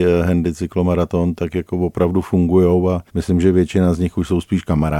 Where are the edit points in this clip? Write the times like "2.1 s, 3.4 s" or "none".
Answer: 3.1 s

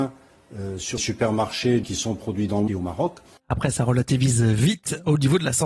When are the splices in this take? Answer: 1.0 s, 1.8 s, 2.7 s

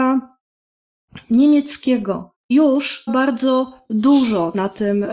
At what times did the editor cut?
2.5 s, 3.1 s

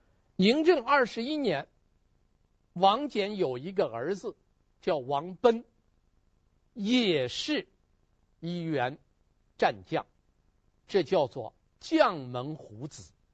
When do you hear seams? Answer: none

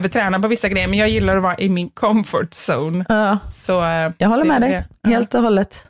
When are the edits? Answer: none

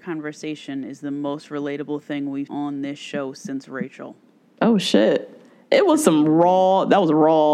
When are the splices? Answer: 2.5 s

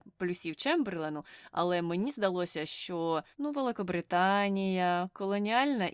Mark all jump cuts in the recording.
3.3 s

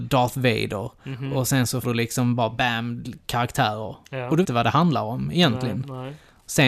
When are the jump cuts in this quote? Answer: 1.8 s, 2.6 s, 4.4 s

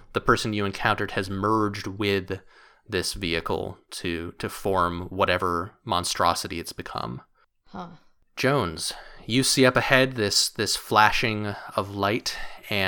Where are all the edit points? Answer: none

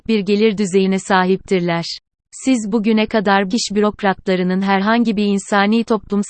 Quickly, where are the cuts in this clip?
3.5 s

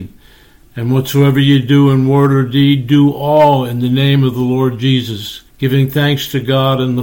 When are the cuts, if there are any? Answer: 5.5 s

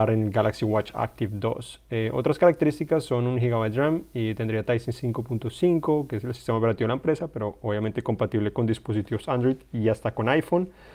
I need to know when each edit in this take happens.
none

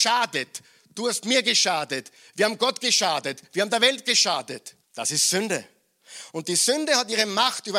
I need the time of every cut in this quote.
4.8 s

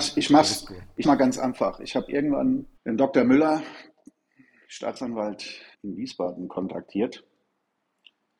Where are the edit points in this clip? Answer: 1.0 s, 2.8 s, 5.7 s

